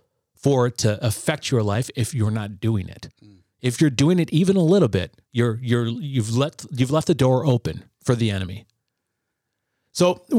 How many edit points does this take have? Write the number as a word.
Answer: two